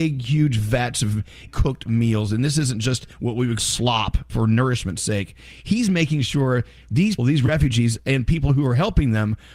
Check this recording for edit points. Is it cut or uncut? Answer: cut